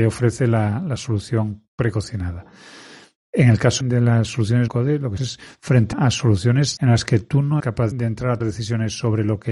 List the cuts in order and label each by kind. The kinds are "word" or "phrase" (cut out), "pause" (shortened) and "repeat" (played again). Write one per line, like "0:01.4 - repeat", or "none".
0:03.8 - word
0:04.7 - word
0:05.2 - word
0:05.9 - word
0:06.8 - word
0:07.6 - word
0:07.9 - word
0:08.4 - word